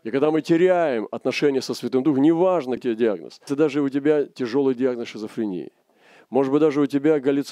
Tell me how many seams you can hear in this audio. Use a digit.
2